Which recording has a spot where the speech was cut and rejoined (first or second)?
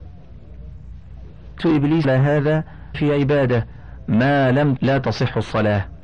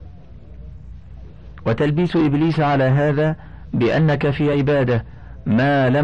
first